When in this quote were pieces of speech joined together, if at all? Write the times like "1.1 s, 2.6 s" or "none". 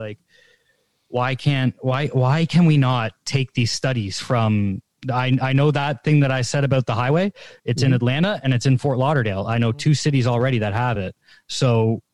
none